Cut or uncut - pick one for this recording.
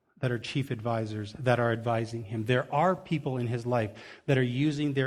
uncut